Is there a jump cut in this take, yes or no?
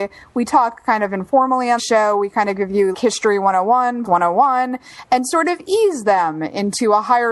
yes